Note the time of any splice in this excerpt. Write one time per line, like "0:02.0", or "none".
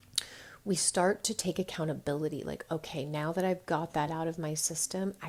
none